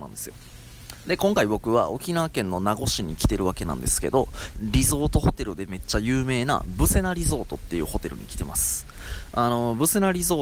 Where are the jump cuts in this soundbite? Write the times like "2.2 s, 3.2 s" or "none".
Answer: 4.5 s